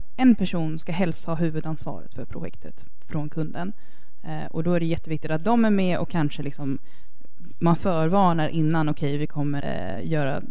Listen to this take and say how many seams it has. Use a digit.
1